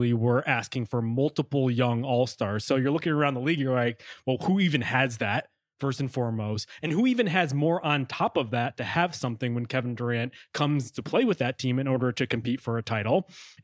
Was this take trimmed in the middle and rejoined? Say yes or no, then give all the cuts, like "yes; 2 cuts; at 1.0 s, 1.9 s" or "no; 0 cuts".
no; 0 cuts